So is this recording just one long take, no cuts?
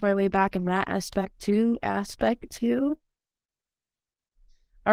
yes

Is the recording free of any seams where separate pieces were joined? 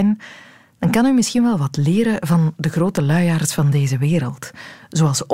yes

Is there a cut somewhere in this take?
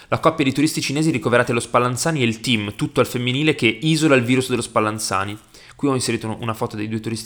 no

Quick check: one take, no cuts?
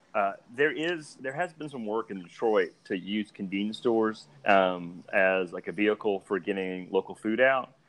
no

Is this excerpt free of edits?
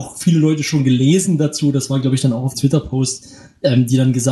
no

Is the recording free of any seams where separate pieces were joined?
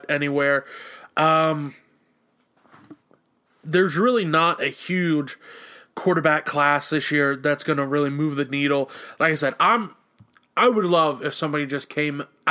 yes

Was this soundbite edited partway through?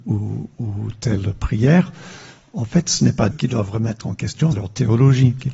yes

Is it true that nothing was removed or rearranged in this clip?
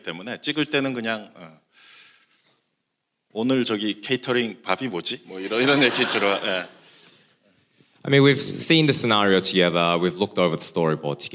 yes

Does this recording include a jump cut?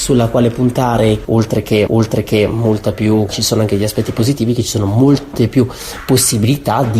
yes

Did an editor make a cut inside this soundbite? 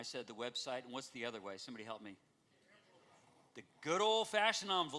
yes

